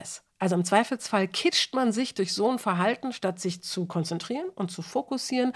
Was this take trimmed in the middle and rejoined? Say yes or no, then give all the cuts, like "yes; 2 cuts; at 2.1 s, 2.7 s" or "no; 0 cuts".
no; 0 cuts